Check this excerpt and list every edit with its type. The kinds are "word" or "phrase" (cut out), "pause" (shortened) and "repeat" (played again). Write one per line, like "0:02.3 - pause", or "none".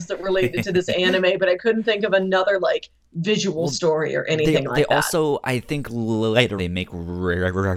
0:06.6 - phrase

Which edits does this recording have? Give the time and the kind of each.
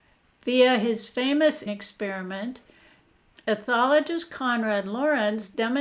0:01.7 - word

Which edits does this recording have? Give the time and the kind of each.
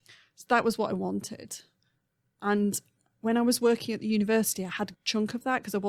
0:04.9 - word

